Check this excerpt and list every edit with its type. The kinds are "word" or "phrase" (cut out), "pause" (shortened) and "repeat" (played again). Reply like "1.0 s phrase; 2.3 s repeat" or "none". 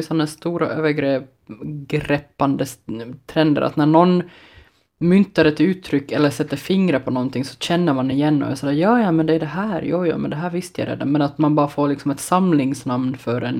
none

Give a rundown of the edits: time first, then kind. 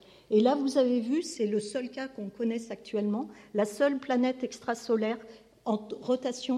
none

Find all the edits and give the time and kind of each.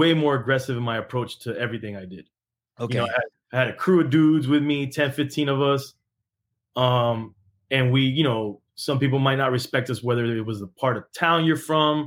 none

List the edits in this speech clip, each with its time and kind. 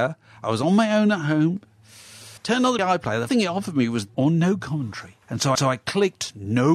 2.4 s pause; 2.8 s word; 3.3 s word; 4.1 s phrase; 5.2 s pause; 5.6 s repeat

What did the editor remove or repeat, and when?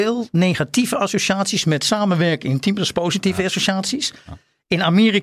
none

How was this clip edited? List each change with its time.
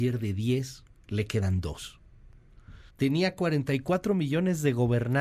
2.9 s pause

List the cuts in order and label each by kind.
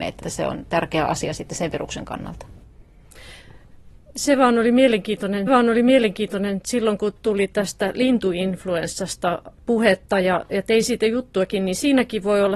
5.5 s repeat; 9.5 s pause

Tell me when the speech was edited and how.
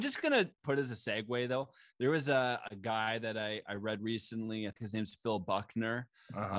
4.7 s word

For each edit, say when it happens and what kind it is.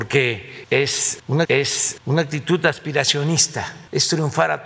1.4 s repeat

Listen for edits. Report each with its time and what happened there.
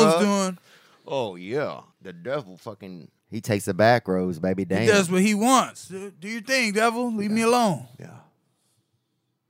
1.9 s pause; 3.2 s pause

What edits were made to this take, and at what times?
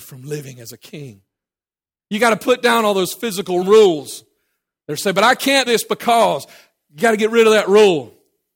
3.6 s word; 5.7 s word

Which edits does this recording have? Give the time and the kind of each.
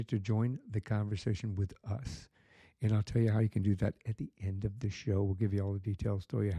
none

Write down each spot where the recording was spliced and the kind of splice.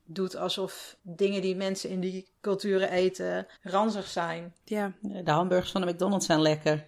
1.0 s word; 2.4 s pause; 3.6 s pause

